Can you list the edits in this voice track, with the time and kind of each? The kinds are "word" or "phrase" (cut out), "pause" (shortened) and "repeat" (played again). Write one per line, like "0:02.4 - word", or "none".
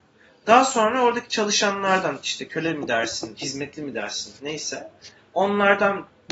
none